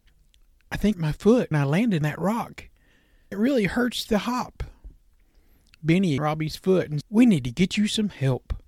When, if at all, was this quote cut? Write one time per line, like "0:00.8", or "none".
0:00.9
0:01.5
0:02.0
0:03.3
0:06.2
0:07.0